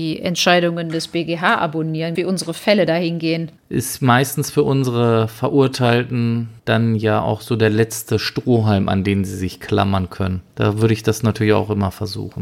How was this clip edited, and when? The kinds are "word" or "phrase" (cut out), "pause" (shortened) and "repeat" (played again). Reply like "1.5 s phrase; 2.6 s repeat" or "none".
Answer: 2.1 s phrase; 3.6 s pause; 6.6 s pause; 10.5 s pause